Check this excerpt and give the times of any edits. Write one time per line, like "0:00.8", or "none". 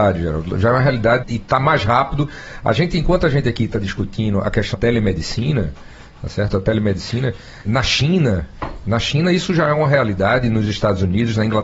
0:01.2
0:04.7
0:07.6